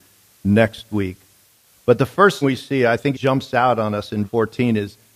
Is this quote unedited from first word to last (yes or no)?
no